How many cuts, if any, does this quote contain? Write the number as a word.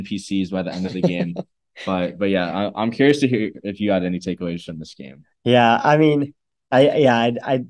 zero